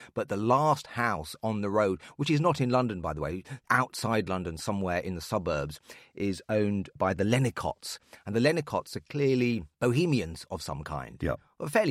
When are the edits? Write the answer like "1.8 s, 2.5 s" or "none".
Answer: 3.6 s

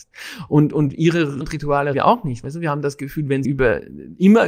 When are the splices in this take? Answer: 1.4 s, 1.9 s, 3.4 s

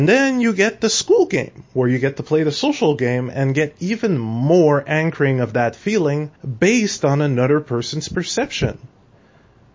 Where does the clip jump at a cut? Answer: 6.4 s

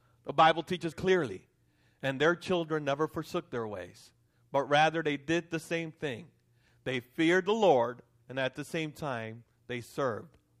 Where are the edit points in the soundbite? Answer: 0.9 s

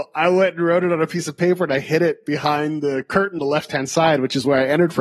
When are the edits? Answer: 3.4 s

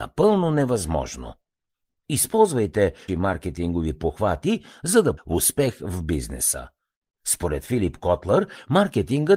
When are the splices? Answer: 3.1 s, 5.2 s

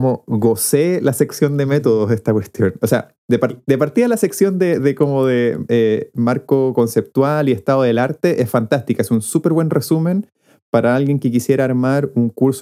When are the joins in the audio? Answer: none

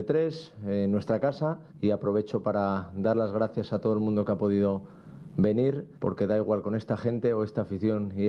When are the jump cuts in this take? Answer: 1.7 s, 5.9 s

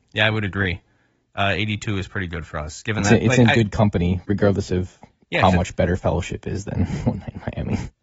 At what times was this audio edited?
5.2 s

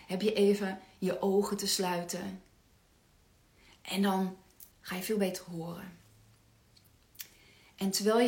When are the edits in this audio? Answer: 4.7 s

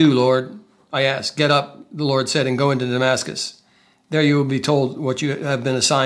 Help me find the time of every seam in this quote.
none

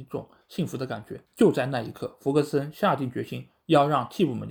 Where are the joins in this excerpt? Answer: 1.3 s

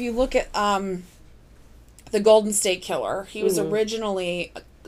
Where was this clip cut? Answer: none

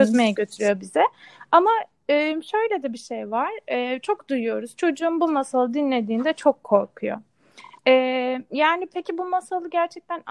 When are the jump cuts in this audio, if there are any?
none

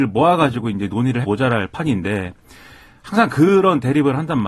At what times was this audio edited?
1.2 s

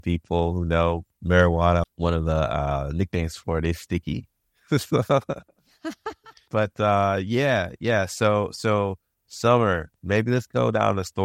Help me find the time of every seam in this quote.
none

